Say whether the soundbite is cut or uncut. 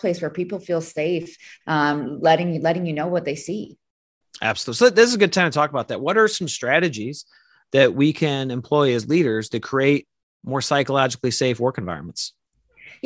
uncut